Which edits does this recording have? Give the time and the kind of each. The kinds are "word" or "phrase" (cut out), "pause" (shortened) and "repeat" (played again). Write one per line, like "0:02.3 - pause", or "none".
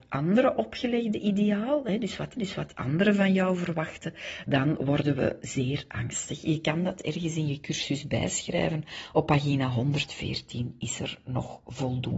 0:02.4 - repeat